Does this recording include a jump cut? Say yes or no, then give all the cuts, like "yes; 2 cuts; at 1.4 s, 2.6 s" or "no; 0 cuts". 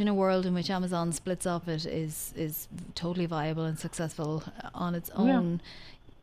yes; 1 cut; at 1.6 s